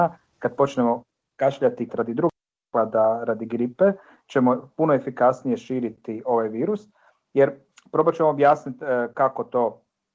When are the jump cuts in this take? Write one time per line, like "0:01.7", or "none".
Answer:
0:01.9